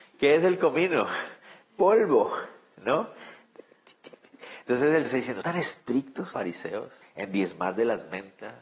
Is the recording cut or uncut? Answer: cut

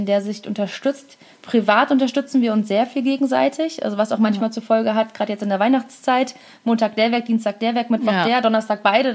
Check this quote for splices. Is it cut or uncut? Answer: uncut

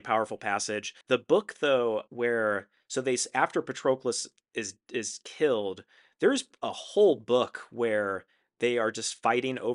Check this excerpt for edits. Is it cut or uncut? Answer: cut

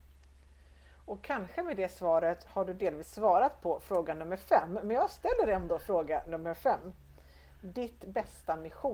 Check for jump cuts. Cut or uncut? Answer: uncut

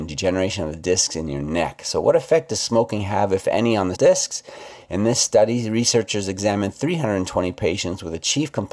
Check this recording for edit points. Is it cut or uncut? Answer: cut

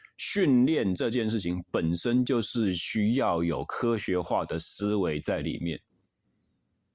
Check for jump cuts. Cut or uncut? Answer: uncut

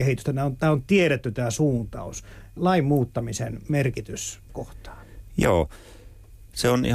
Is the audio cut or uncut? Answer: cut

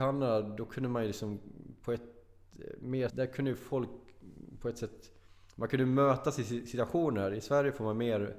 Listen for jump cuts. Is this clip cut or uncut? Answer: cut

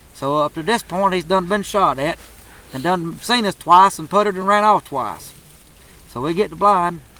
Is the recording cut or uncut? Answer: uncut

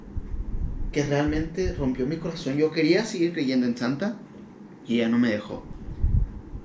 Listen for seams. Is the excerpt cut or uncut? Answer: uncut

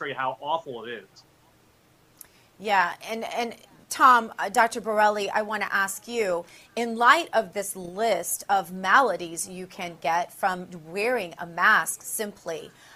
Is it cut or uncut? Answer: uncut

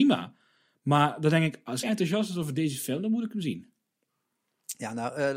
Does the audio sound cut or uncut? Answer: cut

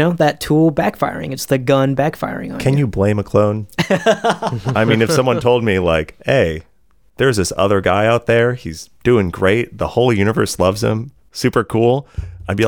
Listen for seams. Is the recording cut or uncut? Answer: uncut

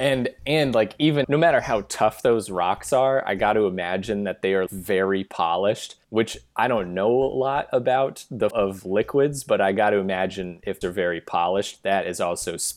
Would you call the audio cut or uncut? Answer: cut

